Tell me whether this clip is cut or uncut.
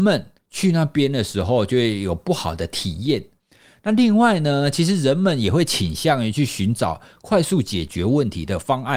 uncut